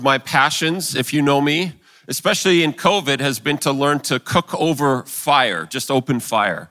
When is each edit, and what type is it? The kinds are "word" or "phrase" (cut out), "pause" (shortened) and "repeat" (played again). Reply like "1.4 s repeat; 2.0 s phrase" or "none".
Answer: none